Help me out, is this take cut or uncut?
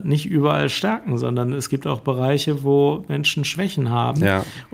uncut